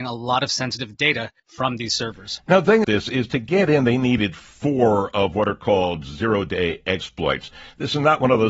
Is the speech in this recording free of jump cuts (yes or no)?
no